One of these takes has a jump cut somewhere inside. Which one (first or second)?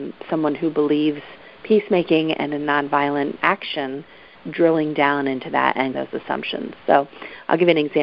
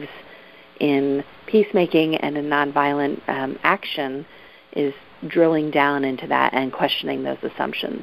first